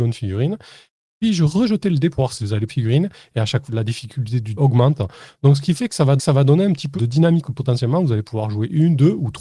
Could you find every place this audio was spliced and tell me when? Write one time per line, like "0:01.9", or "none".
0:02.7
0:03.7
0:04.5
0:06.2
0:07.0
0:07.4

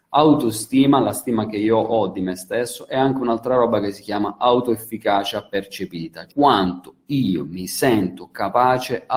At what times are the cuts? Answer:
0:06.3

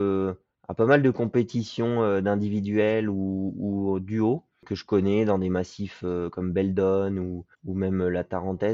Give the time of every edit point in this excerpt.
0:07.5

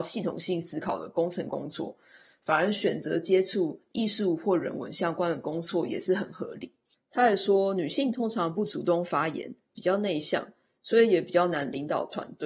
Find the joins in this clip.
none

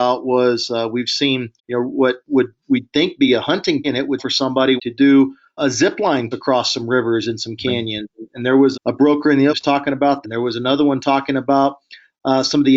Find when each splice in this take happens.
0:01.6
0:03.8
0:04.2
0:04.8
0:05.6
0:06.3
0:08.7
0:09.5
0:10.2

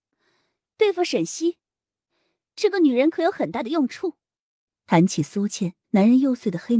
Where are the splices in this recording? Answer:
0:05.8

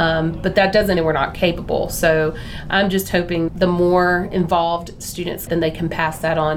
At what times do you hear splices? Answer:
0:01.0
0:03.5
0:05.5

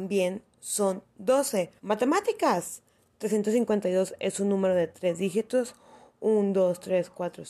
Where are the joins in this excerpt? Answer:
0:01.8

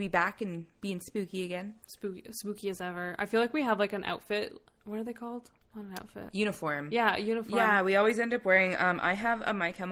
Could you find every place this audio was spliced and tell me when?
none

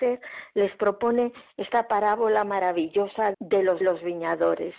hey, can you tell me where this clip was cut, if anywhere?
0:03.3
0:03.8

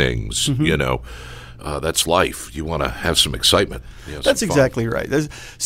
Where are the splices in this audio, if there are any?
none

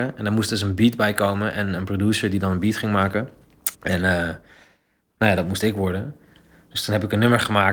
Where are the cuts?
0:03.7

